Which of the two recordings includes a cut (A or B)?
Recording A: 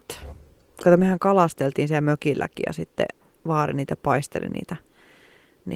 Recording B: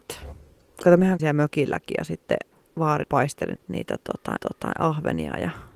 B